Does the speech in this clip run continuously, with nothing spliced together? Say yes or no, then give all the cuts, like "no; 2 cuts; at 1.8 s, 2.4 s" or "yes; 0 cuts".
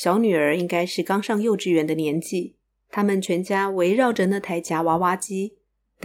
yes; 0 cuts